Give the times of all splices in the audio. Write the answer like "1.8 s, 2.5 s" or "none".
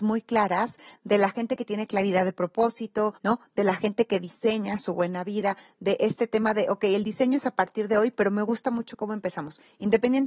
3.2 s

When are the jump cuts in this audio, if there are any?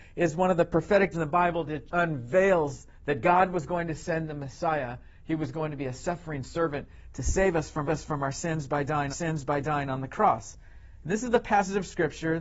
1.1 s, 1.9 s, 3.0 s, 7.9 s, 9.1 s

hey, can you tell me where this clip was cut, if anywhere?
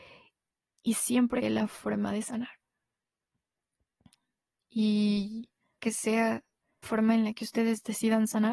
1.4 s, 5.8 s, 6.8 s

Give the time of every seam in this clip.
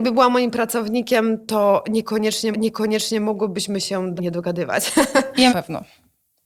2.5 s, 4.2 s, 5.5 s

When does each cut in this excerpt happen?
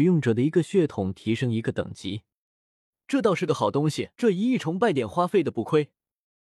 4.1 s

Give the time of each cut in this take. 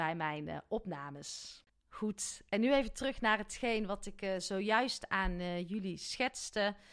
1.7 s

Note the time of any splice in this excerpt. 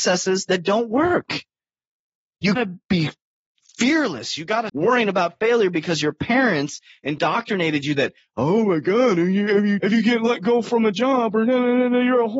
2.6 s, 4.7 s, 9.8 s

